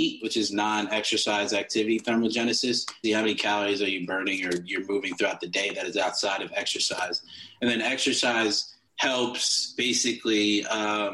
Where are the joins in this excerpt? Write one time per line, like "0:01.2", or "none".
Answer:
0:03.0
0:08.9